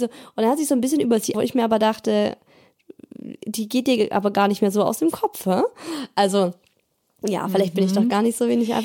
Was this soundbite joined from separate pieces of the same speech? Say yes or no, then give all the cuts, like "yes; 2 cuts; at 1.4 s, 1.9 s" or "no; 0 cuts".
yes; 1 cut; at 1.3 s